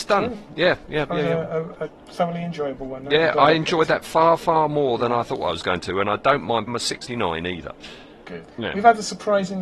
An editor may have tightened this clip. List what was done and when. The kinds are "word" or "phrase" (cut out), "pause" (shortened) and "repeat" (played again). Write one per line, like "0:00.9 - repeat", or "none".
0:06.7 - word
0:07.1 - word
0:08.5 - pause

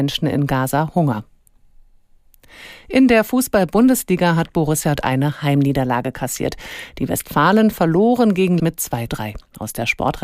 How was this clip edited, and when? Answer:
0:05.0 - word
0:08.6 - word
0:09.1 - word

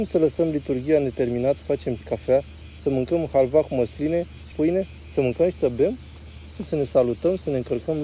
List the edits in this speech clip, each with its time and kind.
0:01.6 - word
0:02.0 - word
0:04.5 - word
0:06.6 - phrase

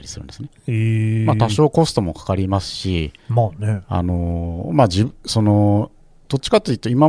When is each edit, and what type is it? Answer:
0:03.2 - pause
0:06.2 - pause

